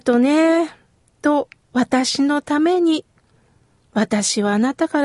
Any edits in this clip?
no; 0 cuts

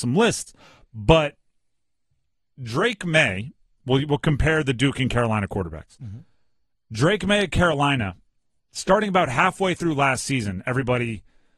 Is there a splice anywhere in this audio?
no; 0 cuts

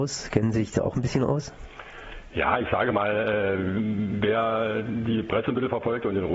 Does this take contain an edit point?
no; 0 cuts

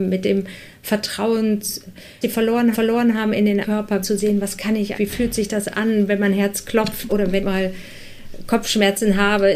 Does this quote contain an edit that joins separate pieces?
yes; 7 cuts; at 2.2 s, 2.7 s, 3.6 s, 4.0 s, 4.9 s, 7.1 s, 7.4 s

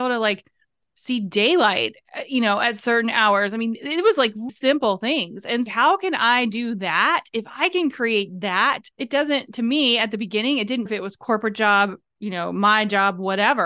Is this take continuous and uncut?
no; 4 cuts; at 4.5 s, 5.7 s, 8.9 s, 10.9 s

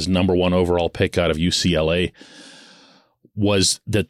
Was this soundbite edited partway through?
no; 0 cuts

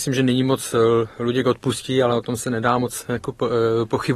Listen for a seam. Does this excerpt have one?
no; 0 cuts

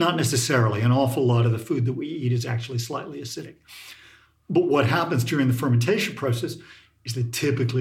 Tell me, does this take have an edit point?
no; 0 cuts

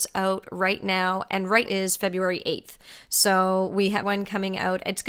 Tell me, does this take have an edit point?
yes; 2 cuts; at 1.7 s, 4.0 s

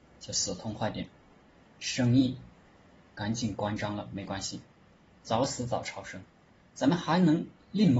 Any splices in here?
no; 0 cuts

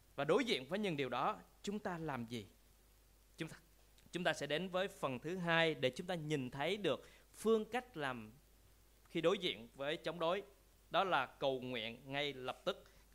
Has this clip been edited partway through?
no; 0 cuts

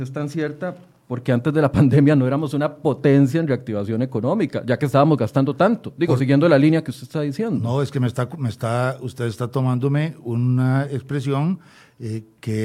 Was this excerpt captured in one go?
yes; 0 cuts

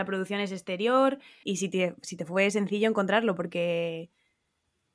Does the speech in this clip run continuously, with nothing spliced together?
no; 1 cut; at 1.4 s

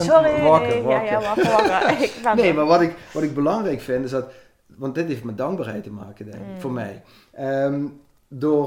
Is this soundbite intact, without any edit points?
yes; 0 cuts

